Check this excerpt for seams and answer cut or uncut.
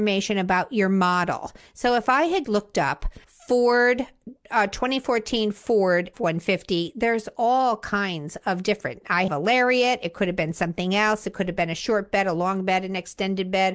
cut